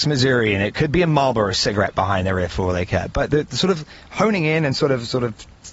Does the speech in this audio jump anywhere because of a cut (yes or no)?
no